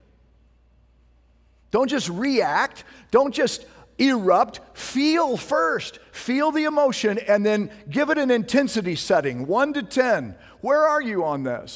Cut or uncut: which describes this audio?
uncut